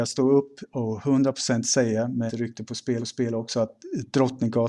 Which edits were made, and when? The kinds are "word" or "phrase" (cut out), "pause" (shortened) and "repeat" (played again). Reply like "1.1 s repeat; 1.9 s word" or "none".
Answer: 2.3 s word; 3.0 s repeat